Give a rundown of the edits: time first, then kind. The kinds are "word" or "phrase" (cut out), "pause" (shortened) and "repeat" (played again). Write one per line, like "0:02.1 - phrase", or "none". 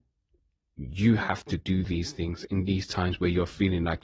none